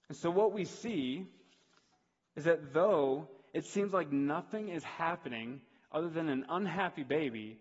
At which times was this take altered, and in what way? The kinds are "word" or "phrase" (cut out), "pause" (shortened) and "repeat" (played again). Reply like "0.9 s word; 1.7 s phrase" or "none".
none